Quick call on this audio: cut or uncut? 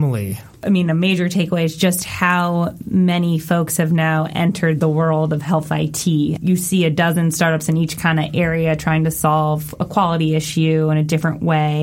uncut